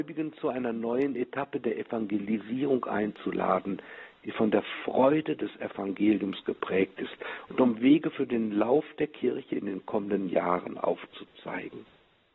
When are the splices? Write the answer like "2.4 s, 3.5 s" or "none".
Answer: none